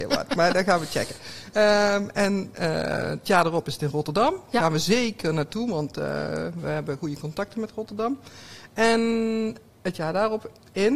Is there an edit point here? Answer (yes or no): no